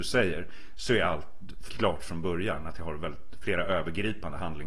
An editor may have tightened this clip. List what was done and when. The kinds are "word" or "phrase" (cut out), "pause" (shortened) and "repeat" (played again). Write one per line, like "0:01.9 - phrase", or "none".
0:01.7 - word

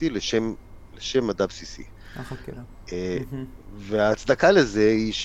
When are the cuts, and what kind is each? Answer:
none

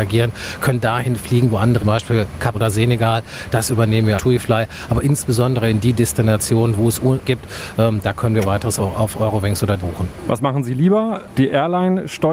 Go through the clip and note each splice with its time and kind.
0:01.8 - phrase
0:02.5 - word
0:04.2 - word
0:07.2 - phrase
0:08.4 - word
0:08.8 - word
0:09.8 - word

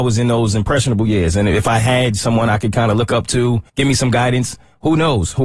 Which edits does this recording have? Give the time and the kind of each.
0:03.7 - pause

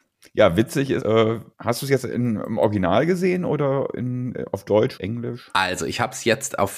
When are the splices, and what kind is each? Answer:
0:01.0 - word
0:01.5 - pause
0:05.0 - word

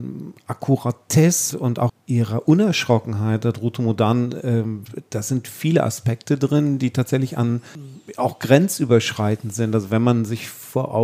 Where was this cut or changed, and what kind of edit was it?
0:01.5 - word
0:01.9 - word

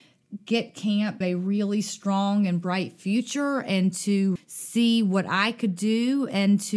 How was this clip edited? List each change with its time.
0:01.2 - word
0:04.4 - word

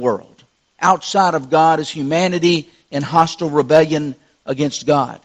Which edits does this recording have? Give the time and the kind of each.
none

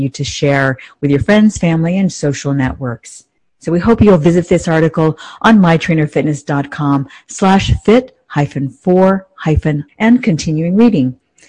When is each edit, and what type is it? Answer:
0:09.9 - word

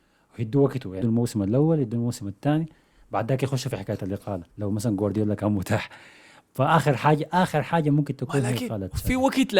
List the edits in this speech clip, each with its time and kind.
0:01.0 - phrase
0:04.5 - pause

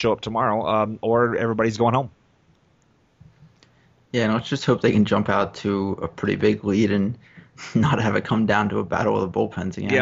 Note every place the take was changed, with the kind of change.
none

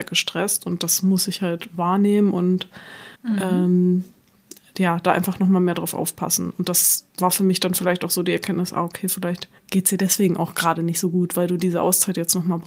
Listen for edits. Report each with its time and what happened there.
0:03.2 - pause
0:07.1 - pause
0:09.6 - pause

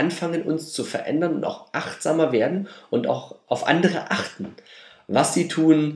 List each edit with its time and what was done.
none

